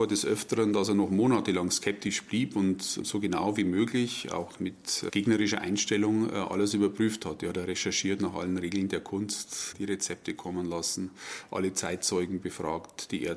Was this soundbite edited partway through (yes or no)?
no